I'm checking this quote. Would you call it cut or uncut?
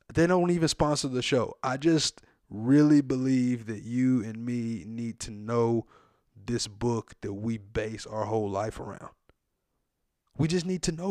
uncut